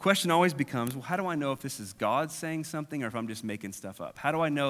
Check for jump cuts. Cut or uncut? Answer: uncut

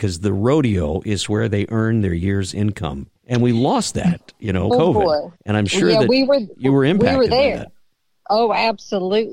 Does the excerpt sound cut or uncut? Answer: cut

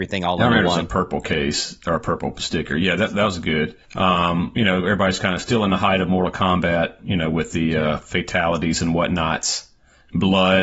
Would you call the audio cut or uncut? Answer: cut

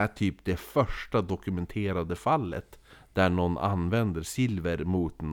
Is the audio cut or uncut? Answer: uncut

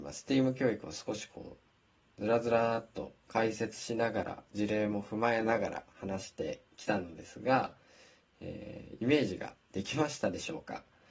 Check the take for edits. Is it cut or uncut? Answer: uncut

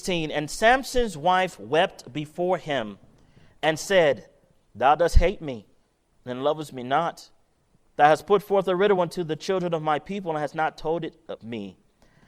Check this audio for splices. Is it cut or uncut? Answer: uncut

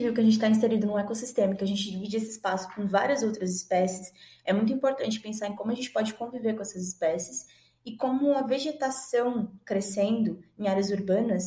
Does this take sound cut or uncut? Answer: uncut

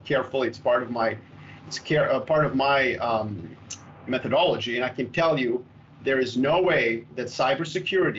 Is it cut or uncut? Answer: uncut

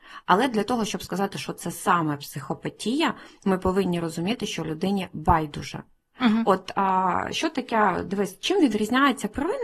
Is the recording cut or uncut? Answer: uncut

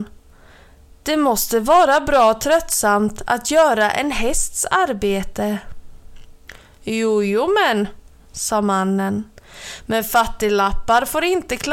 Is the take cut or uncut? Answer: uncut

